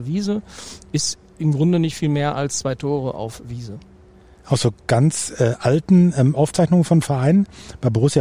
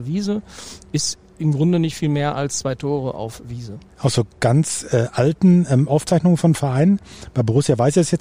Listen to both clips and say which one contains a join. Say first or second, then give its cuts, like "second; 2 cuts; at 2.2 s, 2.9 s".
second; 1 cut; at 3.9 s